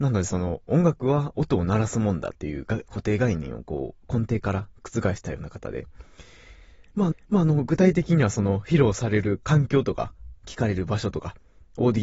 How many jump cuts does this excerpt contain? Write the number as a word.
two